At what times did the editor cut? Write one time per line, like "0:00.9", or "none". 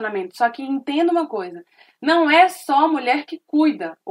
none